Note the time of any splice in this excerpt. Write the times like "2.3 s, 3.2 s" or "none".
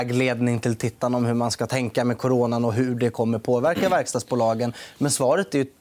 none